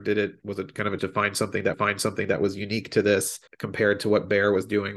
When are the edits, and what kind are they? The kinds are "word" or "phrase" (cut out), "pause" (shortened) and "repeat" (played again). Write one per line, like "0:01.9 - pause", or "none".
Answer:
0:01.0 - word
0:01.7 - repeat
0:03.5 - pause